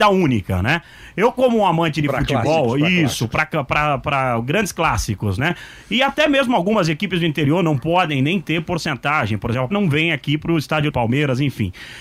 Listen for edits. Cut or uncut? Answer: cut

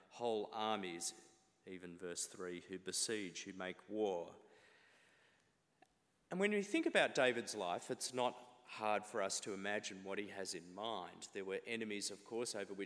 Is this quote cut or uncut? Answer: uncut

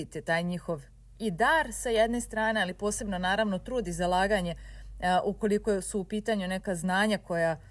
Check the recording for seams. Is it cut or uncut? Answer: uncut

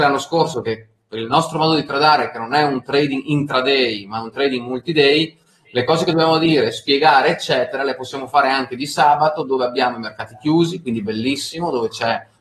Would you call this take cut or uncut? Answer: uncut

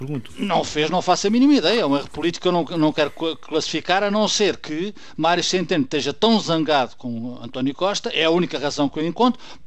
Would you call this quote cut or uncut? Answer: uncut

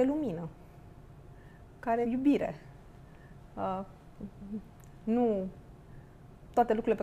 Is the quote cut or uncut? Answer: cut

